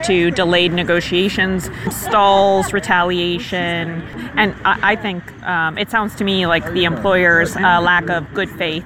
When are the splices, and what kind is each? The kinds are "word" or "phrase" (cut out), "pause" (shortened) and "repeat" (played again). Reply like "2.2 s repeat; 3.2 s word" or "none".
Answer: none